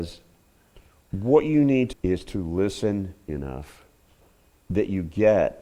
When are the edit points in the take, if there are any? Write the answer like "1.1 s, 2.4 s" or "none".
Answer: 1.9 s, 3.3 s